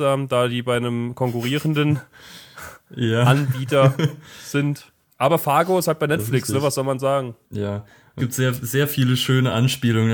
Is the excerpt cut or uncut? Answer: cut